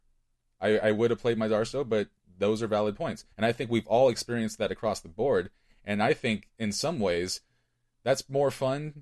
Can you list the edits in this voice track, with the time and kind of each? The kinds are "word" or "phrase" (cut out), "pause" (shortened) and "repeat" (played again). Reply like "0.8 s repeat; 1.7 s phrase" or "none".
3.3 s pause